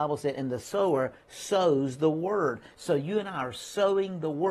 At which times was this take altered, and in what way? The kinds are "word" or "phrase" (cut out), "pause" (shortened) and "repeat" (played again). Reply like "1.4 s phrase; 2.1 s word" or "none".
none